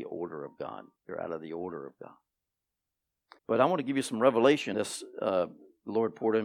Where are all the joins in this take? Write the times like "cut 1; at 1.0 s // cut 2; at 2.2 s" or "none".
cut 1; at 1.0 s // cut 2; at 3.4 s // cut 3; at 4.7 s